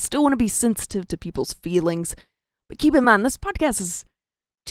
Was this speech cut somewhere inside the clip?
no; 0 cuts

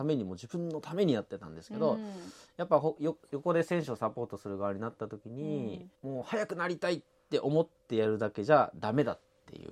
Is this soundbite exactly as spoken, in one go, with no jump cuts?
no; 1 cut; at 5.9 s

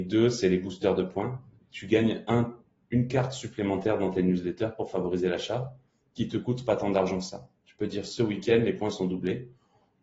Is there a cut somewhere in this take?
no; 0 cuts

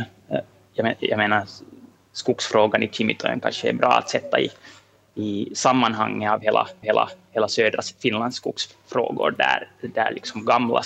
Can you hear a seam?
yes; 1 cut; at 6.8 s

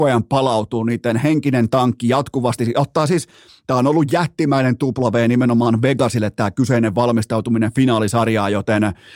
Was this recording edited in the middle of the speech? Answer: no; 0 cuts

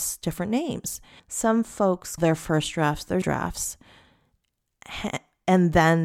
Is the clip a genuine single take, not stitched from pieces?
no; 3 cuts; at 1.2 s, 2.2 s, 3.2 s

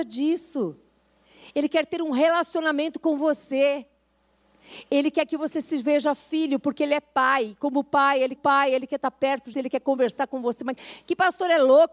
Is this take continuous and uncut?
no; 3 cuts; at 8.4 s, 9.5 s, 10.8 s

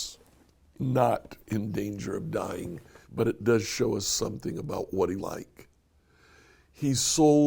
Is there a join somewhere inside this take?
yes; 2 cuts; at 3.0 s, 5.2 s

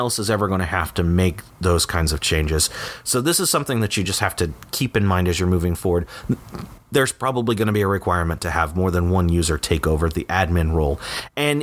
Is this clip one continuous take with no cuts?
yes; 0 cuts

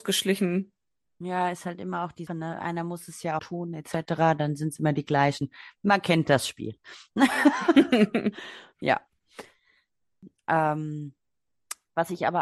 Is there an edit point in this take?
yes; 2 cuts; at 2.3 s, 3.4 s

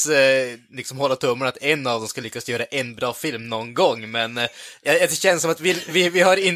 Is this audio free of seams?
yes; 0 cuts

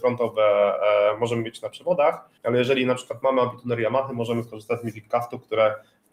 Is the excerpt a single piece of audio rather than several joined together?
no; 1 cut; at 2.4 s

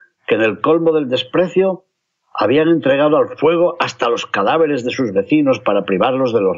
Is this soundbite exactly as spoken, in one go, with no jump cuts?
yes; 0 cuts

